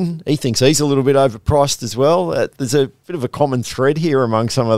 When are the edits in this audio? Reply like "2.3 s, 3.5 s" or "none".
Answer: none